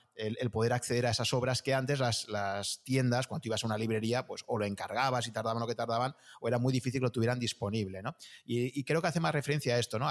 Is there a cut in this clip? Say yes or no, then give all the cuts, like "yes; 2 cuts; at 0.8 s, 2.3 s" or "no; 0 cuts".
no; 0 cuts